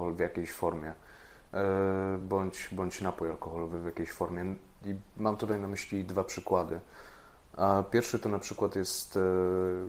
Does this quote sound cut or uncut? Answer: uncut